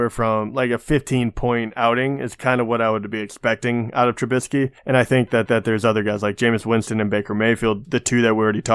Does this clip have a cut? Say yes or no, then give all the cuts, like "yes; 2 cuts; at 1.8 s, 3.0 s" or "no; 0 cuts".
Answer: yes; 3 cuts; at 4.8 s, 5.5 s, 7.8 s